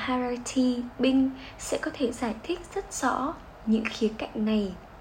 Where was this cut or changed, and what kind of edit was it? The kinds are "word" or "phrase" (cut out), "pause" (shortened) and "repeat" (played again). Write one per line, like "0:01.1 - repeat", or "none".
0:01.0 - word